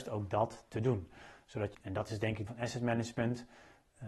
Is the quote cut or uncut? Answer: cut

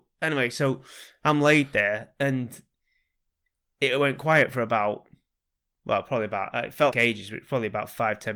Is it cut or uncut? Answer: cut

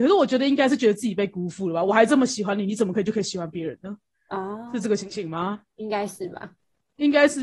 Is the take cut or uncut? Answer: uncut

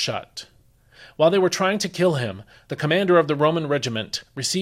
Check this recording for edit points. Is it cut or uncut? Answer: uncut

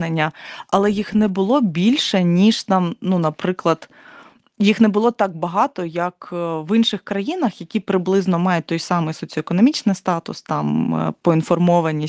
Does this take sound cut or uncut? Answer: uncut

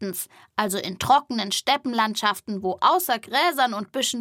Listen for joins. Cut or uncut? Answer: uncut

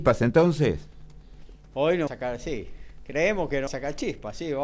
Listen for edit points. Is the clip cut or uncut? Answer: cut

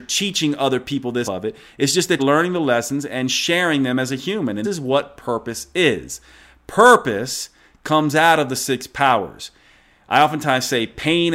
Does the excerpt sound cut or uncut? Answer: cut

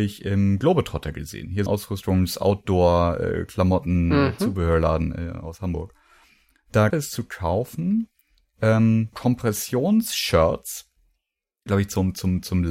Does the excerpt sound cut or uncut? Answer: cut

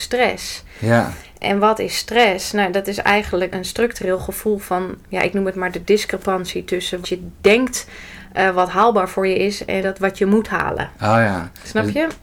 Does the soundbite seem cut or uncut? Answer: cut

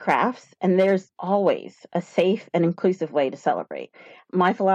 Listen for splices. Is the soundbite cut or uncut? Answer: cut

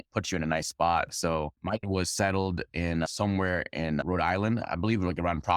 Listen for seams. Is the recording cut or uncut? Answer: cut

